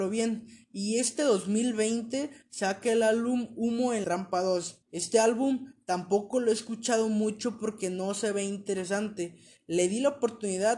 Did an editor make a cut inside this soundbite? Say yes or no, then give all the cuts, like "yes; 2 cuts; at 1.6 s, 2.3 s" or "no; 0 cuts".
yes; 2 cuts; at 4.0 s, 4.8 s